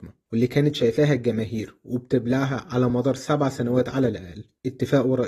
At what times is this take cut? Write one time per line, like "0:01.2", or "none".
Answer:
none